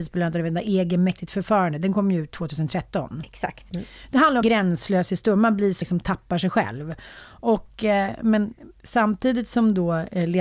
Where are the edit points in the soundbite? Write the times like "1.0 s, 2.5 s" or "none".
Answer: 4.4 s, 5.8 s